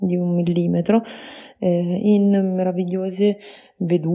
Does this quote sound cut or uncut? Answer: uncut